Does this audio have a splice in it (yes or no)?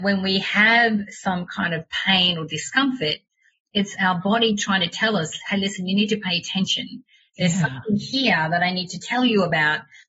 no